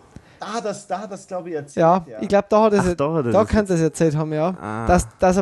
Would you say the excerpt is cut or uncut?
uncut